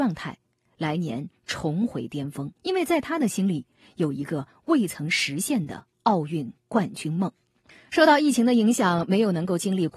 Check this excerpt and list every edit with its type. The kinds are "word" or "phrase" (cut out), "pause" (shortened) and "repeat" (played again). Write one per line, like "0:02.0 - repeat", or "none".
0:02.5 - pause
0:05.9 - pause
0:07.7 - pause